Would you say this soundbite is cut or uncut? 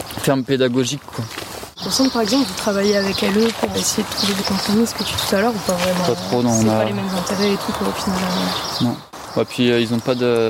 cut